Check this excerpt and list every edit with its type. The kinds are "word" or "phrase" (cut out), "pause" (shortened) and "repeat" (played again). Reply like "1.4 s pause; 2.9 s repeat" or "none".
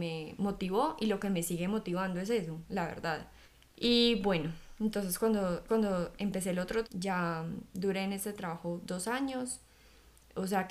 3.4 s pause; 5.7 s repeat; 6.8 s word